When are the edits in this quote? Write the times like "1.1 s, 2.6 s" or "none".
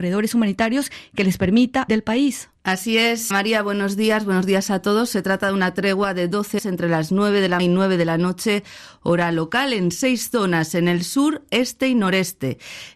1.9 s, 3.3 s, 6.6 s, 7.6 s

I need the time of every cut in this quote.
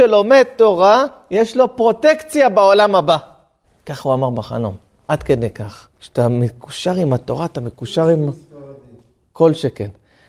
3.6 s, 5.9 s

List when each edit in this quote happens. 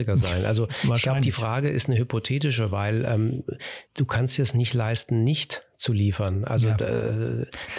3.9 s

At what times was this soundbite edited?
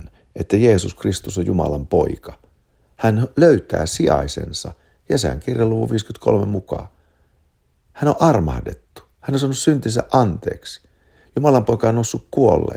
none

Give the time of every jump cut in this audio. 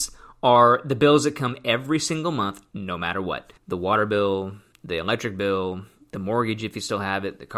none

